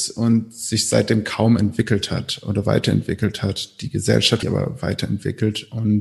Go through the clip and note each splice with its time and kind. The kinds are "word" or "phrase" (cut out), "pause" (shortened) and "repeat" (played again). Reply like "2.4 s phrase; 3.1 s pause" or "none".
4.4 s phrase